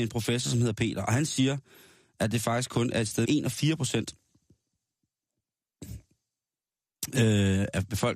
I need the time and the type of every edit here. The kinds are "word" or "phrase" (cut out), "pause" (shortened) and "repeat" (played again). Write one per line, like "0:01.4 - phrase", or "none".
0:03.2 - word